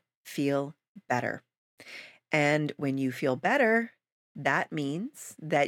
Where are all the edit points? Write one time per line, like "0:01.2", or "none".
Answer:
none